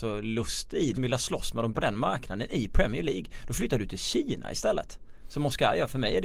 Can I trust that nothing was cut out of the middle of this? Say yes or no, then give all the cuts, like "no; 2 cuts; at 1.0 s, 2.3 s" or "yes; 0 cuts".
no; 2 cuts; at 0.9 s, 1.7 s